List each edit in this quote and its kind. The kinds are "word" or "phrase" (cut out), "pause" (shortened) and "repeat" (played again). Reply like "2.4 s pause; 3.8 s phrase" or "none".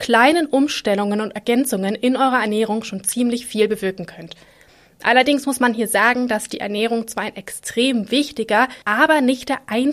8.8 s pause